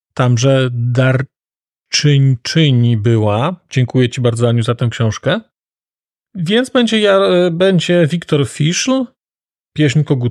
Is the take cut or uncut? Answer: uncut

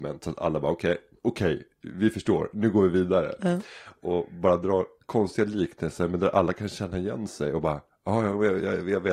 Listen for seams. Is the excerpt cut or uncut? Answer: uncut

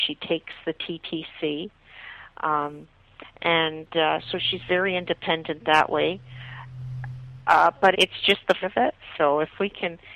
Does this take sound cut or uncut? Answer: cut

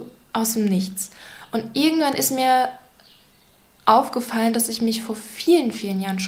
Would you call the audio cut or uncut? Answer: uncut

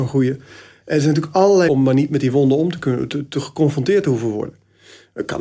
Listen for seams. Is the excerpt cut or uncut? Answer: cut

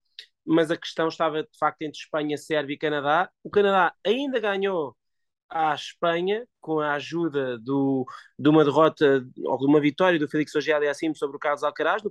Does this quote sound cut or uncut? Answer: uncut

